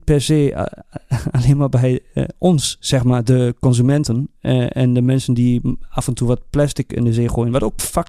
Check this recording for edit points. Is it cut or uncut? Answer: uncut